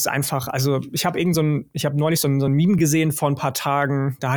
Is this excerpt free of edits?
yes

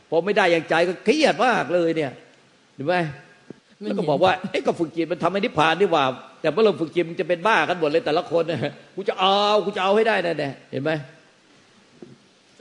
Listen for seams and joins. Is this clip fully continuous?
no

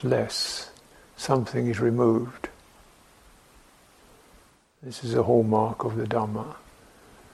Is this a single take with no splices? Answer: yes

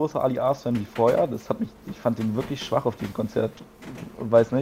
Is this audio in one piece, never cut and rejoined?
yes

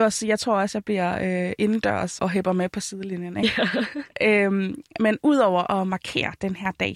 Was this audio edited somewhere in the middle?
yes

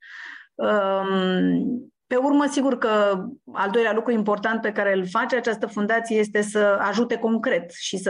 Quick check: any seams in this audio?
yes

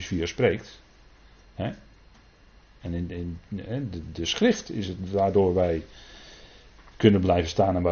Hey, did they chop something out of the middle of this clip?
no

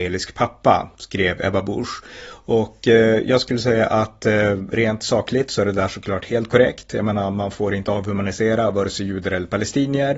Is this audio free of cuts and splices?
yes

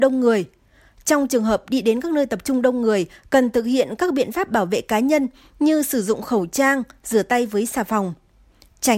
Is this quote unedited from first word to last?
yes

